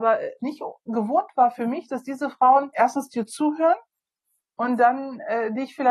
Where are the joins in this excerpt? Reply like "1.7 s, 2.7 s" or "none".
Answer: none

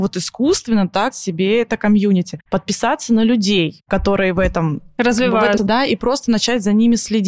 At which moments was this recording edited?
1.1 s, 5.6 s

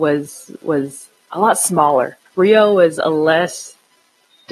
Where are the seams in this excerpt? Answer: 2.3 s

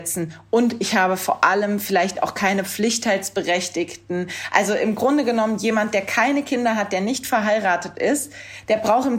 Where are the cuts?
none

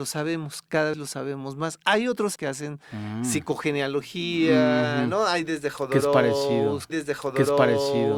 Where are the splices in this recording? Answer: 0.9 s, 2.4 s, 6.9 s

